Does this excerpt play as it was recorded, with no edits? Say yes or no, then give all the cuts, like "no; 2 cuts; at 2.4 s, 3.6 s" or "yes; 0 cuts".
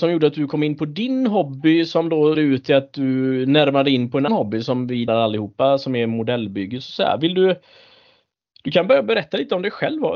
no; 3 cuts; at 2.3 s, 4.3 s, 5.1 s